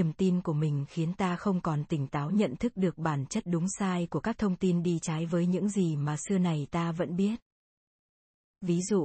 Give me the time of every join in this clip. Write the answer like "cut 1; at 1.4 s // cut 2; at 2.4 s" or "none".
none